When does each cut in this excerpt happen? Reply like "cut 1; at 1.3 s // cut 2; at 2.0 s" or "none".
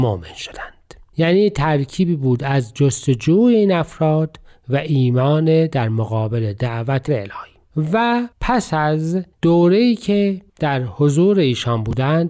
cut 1; at 7.1 s // cut 2; at 8.3 s // cut 3; at 9.3 s // cut 4; at 10.5 s